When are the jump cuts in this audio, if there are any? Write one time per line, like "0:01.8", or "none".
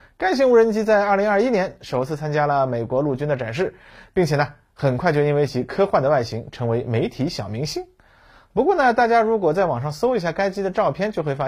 none